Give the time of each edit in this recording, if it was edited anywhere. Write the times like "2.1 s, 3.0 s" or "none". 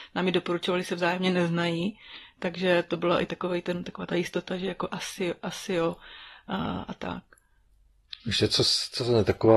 8.2 s